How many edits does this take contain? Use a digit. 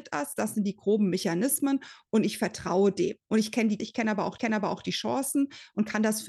2